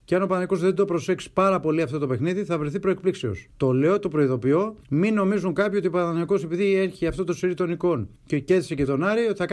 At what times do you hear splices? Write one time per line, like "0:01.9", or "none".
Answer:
0:03.5
0:04.8
0:08.2